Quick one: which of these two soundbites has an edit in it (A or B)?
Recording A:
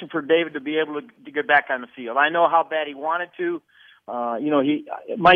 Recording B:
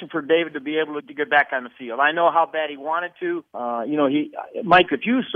B